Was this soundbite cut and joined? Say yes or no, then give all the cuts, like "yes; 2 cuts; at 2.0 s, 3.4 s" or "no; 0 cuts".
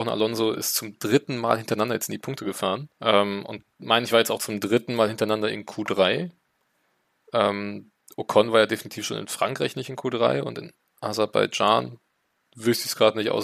yes; 1 cut; at 2.9 s